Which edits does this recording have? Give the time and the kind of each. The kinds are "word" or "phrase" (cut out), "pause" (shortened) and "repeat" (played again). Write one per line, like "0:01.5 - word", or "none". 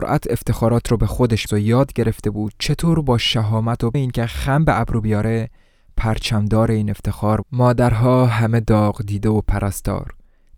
0:01.5 - word
0:03.9 - word
0:07.4 - word